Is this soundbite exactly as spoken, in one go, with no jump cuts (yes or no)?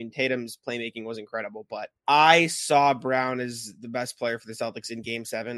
no